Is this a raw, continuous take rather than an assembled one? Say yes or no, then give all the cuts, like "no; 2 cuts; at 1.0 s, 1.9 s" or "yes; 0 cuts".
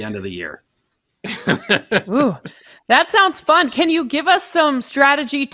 yes; 0 cuts